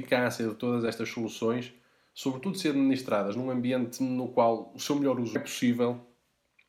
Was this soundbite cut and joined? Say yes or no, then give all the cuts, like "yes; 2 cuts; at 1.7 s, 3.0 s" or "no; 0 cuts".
yes; 1 cut; at 5.4 s